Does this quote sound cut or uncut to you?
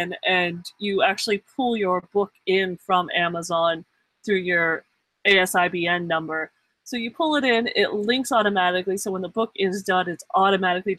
uncut